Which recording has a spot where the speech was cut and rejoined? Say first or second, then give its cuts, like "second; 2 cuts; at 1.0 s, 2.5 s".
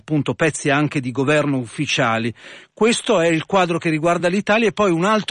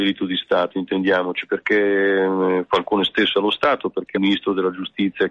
second; 2 cuts; at 3.3 s, 4.1 s